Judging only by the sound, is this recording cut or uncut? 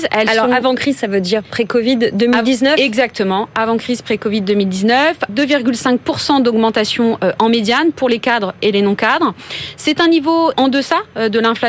cut